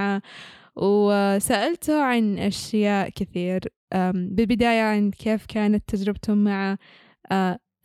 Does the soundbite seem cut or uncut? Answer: uncut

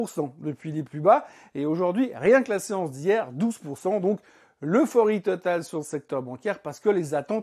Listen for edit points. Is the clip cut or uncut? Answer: uncut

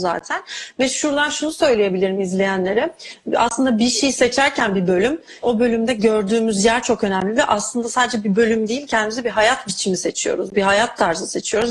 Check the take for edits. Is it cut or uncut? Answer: cut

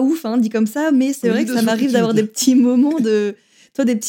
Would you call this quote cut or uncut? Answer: uncut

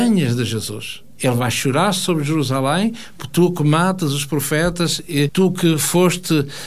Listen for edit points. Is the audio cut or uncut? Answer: cut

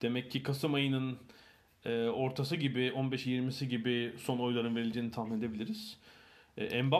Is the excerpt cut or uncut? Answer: uncut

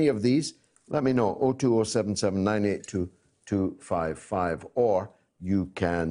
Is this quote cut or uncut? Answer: uncut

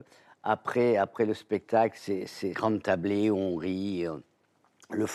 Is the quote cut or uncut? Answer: cut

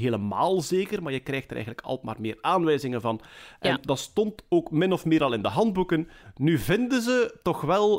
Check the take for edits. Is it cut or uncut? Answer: uncut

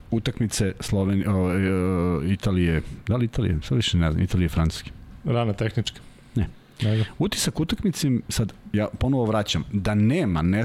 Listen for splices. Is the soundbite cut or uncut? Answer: uncut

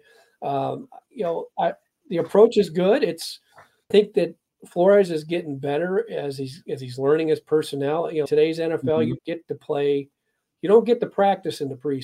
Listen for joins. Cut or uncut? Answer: cut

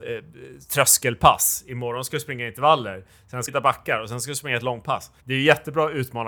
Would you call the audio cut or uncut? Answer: cut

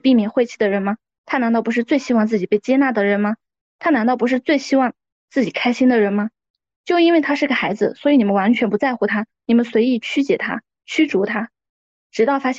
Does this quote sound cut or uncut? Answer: uncut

